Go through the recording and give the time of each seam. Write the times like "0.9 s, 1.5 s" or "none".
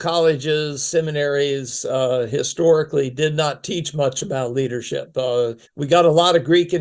5.6 s